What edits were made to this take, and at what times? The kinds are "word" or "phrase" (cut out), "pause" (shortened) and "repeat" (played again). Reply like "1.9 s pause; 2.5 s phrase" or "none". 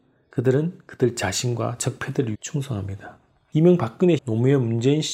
2.3 s word; 4.2 s word